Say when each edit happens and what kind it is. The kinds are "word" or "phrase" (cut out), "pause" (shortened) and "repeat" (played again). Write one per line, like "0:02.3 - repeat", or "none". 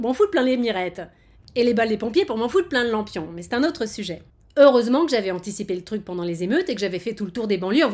0:04.3 - pause